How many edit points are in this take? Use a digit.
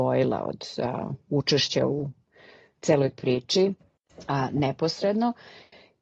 1